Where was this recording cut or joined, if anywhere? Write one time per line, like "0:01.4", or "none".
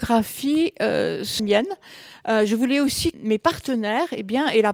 0:01.4
0:03.1